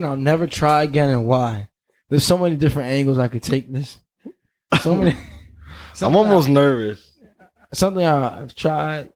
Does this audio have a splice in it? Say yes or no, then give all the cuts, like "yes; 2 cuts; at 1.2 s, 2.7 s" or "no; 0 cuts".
no; 0 cuts